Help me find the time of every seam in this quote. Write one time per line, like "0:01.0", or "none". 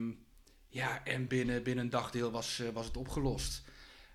0:01.3